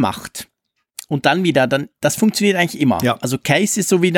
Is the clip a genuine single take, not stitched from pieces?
yes; 0 cuts

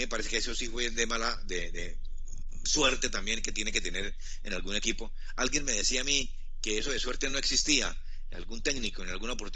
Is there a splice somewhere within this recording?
no; 0 cuts

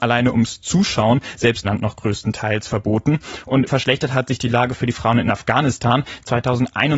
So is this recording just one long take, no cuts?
no; 2 cuts; at 1.6 s, 3.7 s

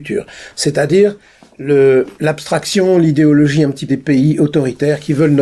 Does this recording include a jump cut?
yes; 2 cuts; at 2.1 s, 3.9 s

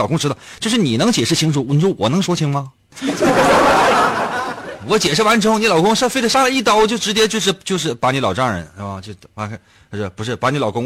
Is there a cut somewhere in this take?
no; 0 cuts

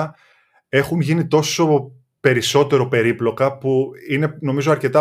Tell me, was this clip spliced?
no; 0 cuts

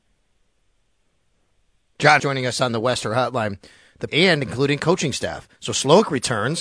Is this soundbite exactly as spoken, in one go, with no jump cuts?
no; 3 cuts; at 2.2 s, 4.1 s, 5.5 s

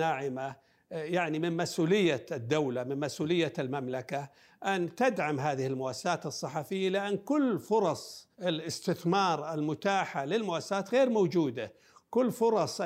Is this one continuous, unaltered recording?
no; 1 cut; at 8.3 s

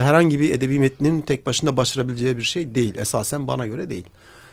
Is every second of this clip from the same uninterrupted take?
yes; 0 cuts

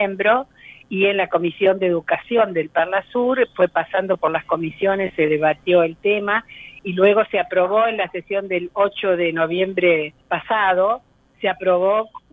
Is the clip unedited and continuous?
no; 1 cut; at 10.2 s

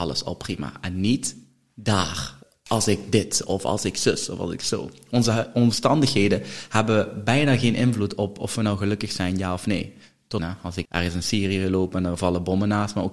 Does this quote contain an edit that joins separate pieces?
yes; 3 cuts; at 2.4 s, 10.4 s, 10.8 s

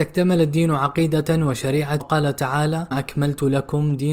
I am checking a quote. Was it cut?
yes; 2 cuts; at 2.0 s, 2.9 s

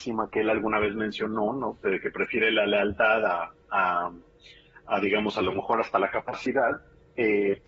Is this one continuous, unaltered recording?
yes; 0 cuts

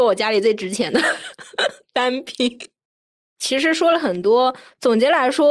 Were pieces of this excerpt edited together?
no; 0 cuts

